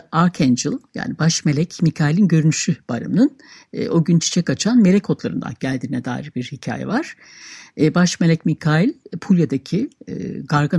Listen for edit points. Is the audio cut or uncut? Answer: uncut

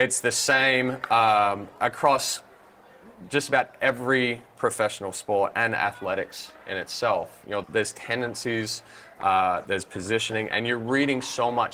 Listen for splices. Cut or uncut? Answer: cut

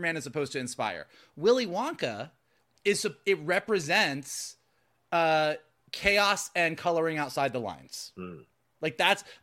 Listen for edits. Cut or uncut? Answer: uncut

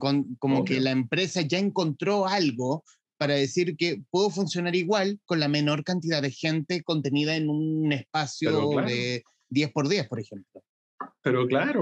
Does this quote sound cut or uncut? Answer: uncut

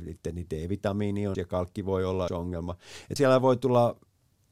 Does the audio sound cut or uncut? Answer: cut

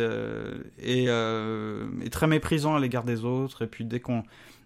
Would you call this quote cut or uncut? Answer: uncut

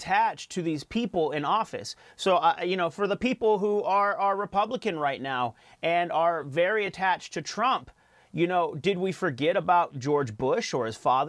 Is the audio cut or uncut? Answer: uncut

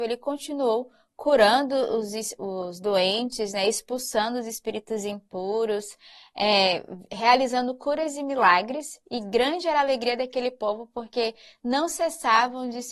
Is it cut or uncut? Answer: uncut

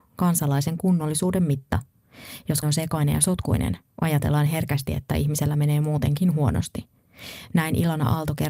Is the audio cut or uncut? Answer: cut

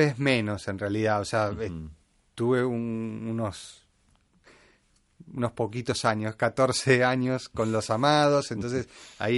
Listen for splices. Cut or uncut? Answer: uncut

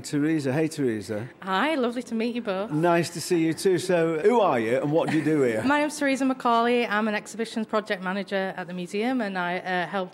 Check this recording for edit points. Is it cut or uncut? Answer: cut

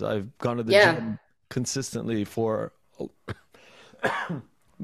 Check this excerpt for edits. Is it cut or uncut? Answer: uncut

